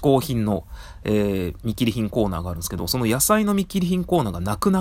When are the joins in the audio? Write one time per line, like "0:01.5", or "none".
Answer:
none